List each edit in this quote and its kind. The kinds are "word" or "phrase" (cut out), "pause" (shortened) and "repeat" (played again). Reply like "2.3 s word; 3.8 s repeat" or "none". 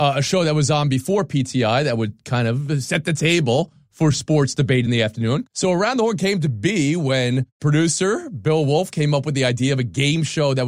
none